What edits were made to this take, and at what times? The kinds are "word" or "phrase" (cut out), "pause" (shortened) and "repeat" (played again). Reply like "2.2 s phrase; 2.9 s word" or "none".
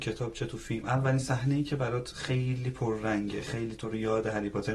none